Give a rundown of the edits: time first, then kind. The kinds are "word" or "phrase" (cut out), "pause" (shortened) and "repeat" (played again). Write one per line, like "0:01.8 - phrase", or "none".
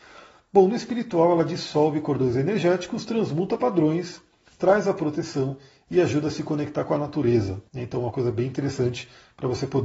0:07.7 - pause